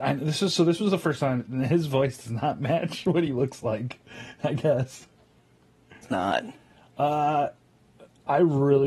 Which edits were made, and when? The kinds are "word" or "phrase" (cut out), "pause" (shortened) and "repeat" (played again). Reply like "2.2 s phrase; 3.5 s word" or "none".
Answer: none